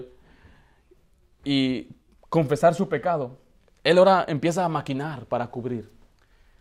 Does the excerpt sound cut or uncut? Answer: uncut